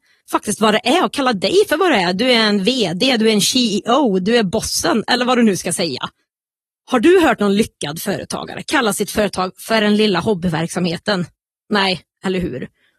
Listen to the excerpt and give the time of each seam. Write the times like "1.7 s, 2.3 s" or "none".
none